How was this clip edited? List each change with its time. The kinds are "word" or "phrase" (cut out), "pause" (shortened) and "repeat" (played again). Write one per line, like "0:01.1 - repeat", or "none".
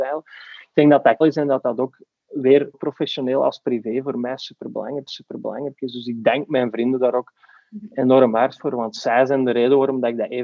0:01.2 - word
0:02.7 - word
0:05.1 - repeat